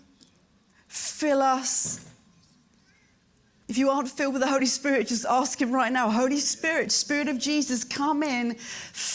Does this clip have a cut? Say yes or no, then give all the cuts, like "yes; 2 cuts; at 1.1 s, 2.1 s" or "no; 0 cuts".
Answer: no; 0 cuts